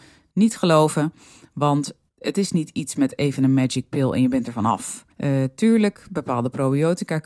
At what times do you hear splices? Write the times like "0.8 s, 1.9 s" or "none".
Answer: 5.1 s